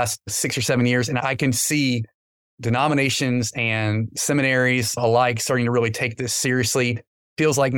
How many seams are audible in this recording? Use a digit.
0